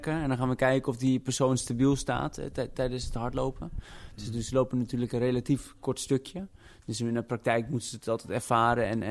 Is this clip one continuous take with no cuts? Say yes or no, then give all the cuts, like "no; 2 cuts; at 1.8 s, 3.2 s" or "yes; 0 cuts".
yes; 0 cuts